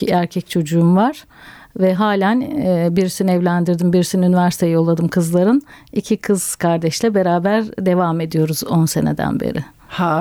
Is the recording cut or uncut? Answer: uncut